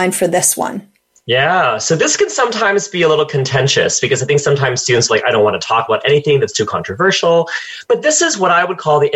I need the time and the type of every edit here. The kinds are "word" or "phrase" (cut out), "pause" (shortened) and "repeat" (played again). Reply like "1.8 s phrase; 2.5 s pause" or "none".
none